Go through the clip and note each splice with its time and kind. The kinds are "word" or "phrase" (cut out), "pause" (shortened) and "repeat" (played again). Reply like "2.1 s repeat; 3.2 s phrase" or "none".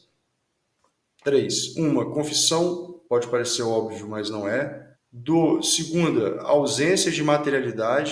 3.0 s pause; 4.9 s pause